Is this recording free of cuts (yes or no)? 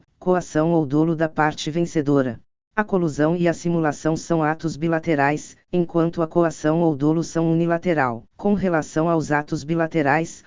no